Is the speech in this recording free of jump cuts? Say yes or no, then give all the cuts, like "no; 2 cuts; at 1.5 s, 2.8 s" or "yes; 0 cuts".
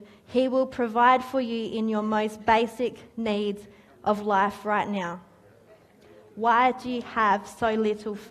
yes; 0 cuts